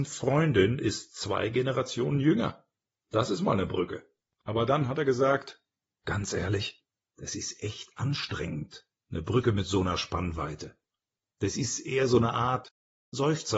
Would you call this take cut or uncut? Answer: uncut